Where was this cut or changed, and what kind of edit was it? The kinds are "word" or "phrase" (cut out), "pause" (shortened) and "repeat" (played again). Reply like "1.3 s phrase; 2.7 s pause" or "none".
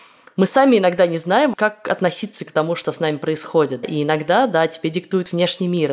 3.8 s word